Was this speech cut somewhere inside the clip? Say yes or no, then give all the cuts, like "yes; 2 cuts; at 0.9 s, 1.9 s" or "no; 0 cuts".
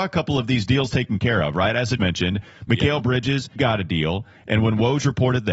yes; 2 cuts; at 2.0 s, 3.6 s